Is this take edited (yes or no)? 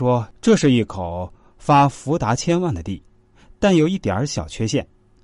no